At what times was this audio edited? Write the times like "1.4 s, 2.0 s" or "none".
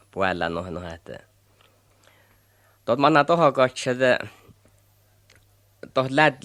none